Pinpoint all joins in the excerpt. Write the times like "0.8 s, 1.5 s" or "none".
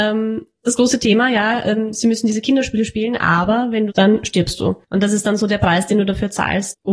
3.9 s